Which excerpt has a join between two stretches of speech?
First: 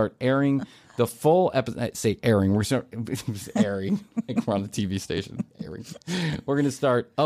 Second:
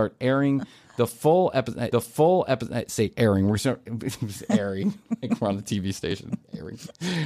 second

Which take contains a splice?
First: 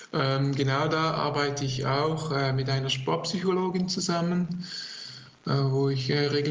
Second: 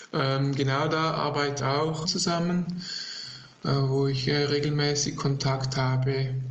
second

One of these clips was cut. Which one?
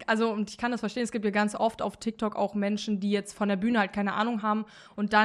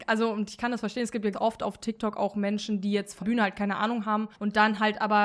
second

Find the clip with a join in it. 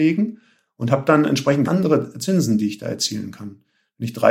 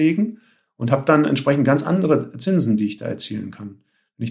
first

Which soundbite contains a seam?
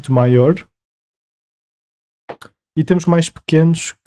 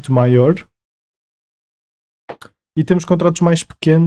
first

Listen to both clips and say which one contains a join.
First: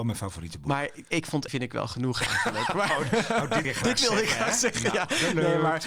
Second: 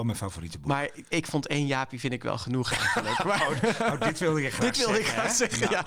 first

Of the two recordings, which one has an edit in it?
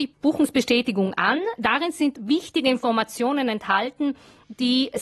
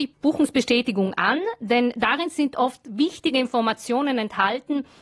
first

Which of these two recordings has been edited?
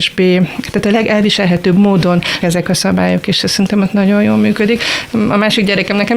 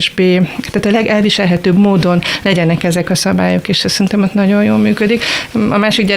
first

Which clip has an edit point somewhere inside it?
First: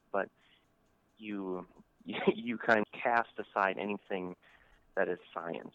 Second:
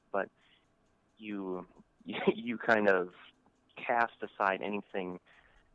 first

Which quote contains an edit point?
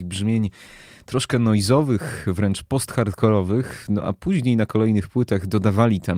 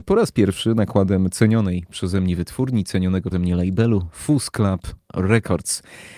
second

